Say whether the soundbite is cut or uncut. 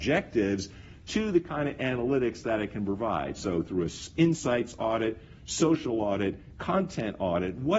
uncut